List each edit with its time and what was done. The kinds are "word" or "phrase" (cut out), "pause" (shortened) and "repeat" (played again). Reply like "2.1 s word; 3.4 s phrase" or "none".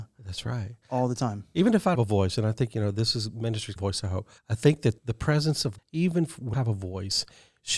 1.9 s phrase; 3.8 s phrase; 4.4 s pause; 5.0 s word; 5.8 s word; 6.5 s phrase